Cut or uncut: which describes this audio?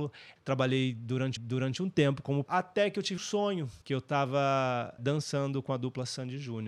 cut